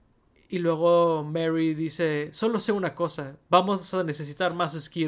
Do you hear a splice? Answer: no; 0 cuts

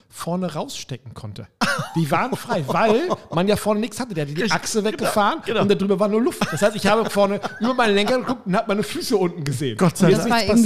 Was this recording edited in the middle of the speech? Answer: no; 0 cuts

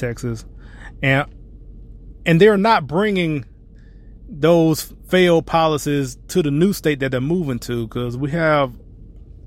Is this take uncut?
yes; 0 cuts

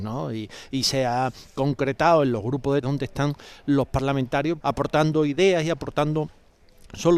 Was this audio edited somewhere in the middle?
yes; 2 cuts; at 2.8 s, 4.6 s

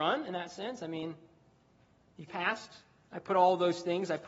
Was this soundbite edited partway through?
yes; 1 cut; at 2.3 s

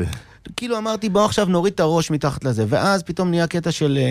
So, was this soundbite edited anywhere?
no; 0 cuts

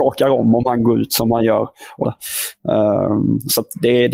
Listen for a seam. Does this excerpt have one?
yes; 1 cut; at 2.0 s

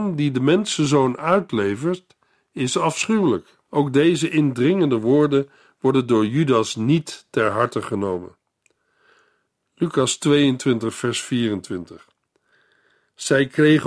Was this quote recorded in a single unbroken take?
no; 1 cut; at 3.6 s

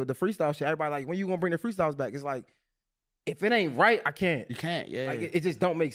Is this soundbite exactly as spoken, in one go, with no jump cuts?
yes; 0 cuts

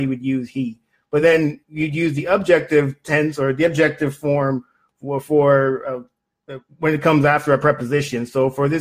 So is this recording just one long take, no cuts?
yes; 0 cuts

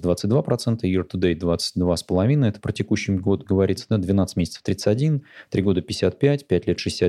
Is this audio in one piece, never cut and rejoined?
yes; 0 cuts

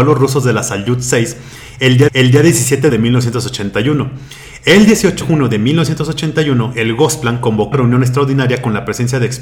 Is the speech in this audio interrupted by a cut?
yes; 4 cuts; at 2.1 s, 2.9 s, 5.2 s, 7.7 s

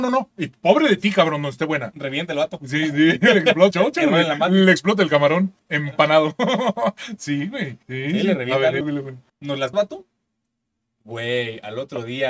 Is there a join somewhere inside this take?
yes; 6 cuts; at 3.7 s, 5.6 s, 7.8 s, 8.8 s, 9.3 s, 9.7 s

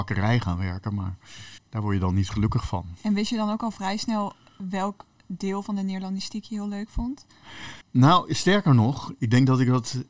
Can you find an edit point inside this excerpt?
yes; 3 cuts; at 1.6 s, 3.0 s, 7.8 s

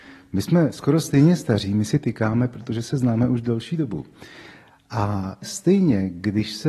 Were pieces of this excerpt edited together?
no; 0 cuts

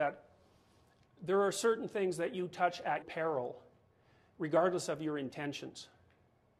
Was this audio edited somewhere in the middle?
yes; 1 cut; at 3.0 s

